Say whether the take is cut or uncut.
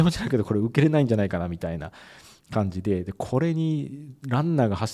uncut